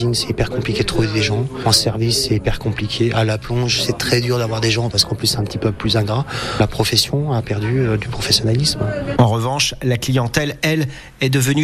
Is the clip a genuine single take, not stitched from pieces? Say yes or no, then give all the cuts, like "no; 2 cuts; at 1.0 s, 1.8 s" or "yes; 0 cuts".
yes; 0 cuts